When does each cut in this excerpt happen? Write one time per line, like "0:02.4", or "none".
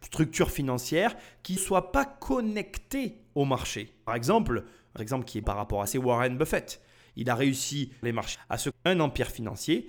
0:01.6
0:04.1
0:05.0
0:05.4
0:05.9
0:08.0
0:08.3
0:08.7